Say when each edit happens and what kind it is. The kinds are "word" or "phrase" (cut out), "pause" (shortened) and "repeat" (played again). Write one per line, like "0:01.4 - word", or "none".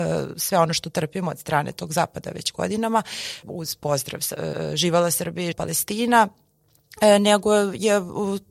0:03.4 - word
0:04.5 - repeat
0:05.5 - word